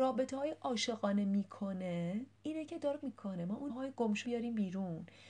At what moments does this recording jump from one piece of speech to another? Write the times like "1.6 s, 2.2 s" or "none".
2.4 s, 3.0 s, 3.7 s, 4.2 s